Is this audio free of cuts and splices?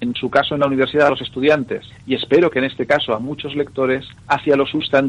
no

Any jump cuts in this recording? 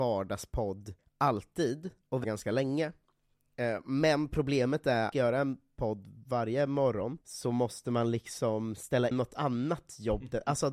yes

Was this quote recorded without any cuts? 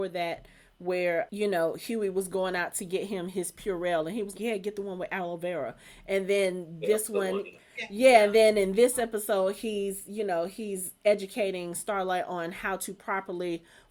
no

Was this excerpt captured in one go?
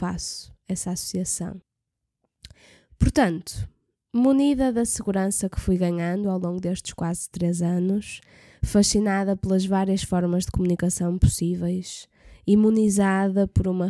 yes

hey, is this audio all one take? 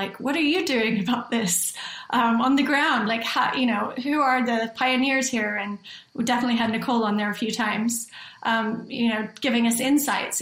yes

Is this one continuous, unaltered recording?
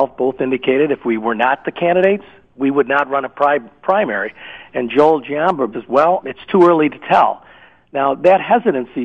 no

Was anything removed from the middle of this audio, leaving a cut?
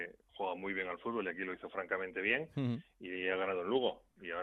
no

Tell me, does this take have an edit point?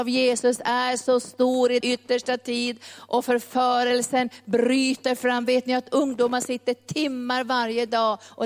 yes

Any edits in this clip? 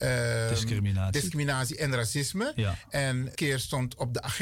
yes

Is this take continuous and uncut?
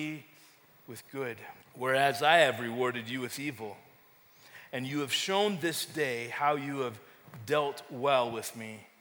no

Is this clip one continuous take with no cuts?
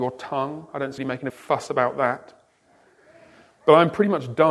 no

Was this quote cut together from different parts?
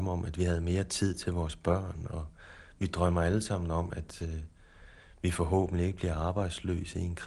no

